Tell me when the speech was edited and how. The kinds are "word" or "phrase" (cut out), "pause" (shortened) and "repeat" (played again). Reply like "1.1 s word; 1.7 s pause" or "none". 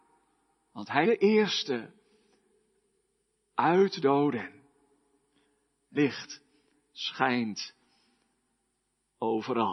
1.0 s word; 4.0 s phrase; 6.0 s word